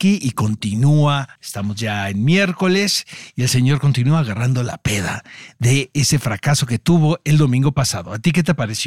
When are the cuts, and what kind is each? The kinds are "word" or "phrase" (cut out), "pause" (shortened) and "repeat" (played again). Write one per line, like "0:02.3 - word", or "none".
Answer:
0:01.4 - pause